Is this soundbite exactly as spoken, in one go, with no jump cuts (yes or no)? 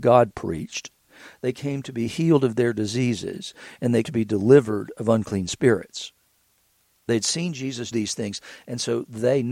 no